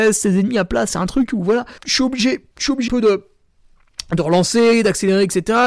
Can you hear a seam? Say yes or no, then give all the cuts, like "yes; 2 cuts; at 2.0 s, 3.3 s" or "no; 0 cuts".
yes; 3 cuts; at 1.8 s, 2.5 s, 2.9 s